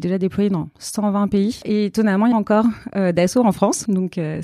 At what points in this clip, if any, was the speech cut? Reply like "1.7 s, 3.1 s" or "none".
2.3 s